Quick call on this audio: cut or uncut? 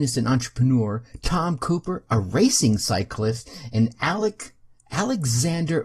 uncut